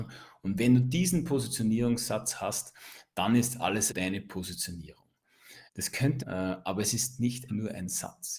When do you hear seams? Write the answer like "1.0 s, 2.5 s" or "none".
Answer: 3.9 s, 5.7 s, 6.2 s, 7.5 s